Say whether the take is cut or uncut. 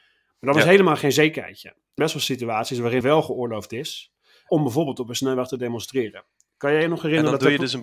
cut